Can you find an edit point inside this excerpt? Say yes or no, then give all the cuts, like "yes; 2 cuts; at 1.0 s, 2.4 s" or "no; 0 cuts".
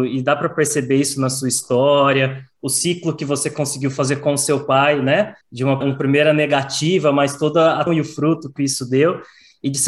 yes; 3 cuts; at 5.4 s, 5.8 s, 7.9 s